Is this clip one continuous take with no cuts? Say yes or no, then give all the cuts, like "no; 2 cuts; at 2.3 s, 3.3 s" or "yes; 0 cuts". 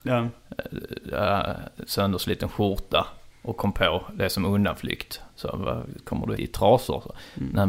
no; 2 cuts; at 3.3 s, 6.3 s